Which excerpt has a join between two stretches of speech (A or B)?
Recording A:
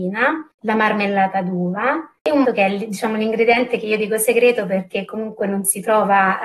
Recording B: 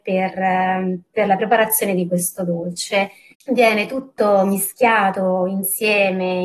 A